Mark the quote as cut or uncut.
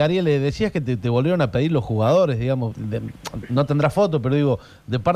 cut